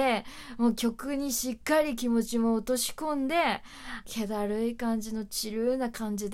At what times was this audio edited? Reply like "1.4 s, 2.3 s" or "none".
4.0 s